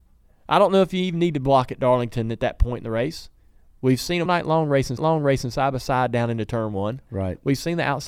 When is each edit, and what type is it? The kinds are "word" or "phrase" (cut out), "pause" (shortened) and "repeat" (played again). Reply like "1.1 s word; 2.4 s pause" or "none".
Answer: 4.3 s word; 5.0 s repeat